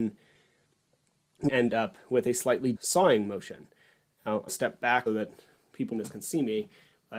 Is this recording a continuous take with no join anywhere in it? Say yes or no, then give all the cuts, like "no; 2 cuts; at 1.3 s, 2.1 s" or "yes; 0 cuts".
no; 5 cuts; at 1.5 s, 2.8 s, 4.5 s, 5.1 s, 5.9 s